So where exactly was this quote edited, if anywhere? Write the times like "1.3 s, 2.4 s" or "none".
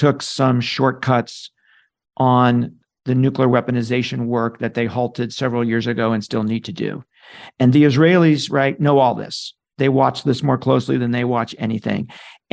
none

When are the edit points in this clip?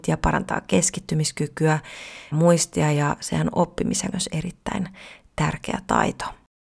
2.3 s, 4.1 s

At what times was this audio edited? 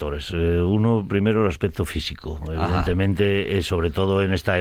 1.1 s

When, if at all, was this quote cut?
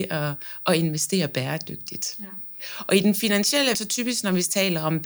3.7 s

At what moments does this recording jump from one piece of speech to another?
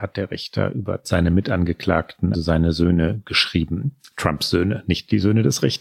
1.0 s, 2.3 s

